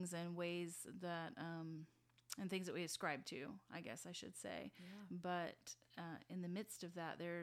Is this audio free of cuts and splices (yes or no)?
yes